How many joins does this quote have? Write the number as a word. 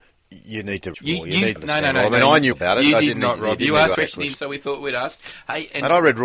five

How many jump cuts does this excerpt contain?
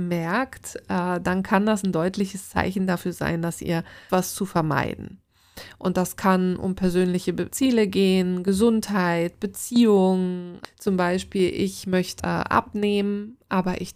three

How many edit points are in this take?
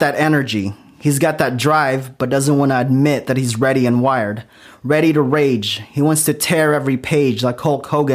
zero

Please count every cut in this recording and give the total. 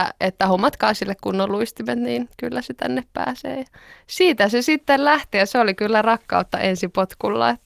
zero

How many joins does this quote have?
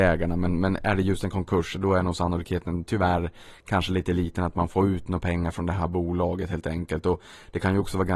zero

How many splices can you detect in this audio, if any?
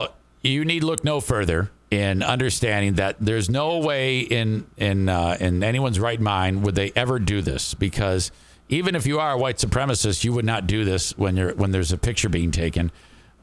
one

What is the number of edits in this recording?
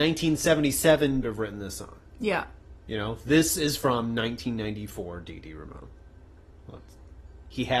one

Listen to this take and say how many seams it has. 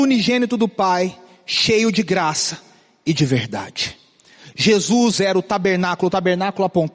zero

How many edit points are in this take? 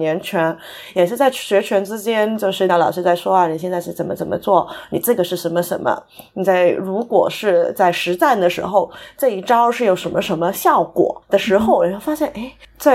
one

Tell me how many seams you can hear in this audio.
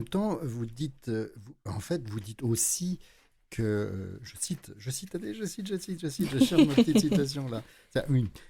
zero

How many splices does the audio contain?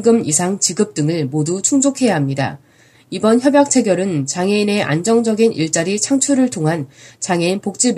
zero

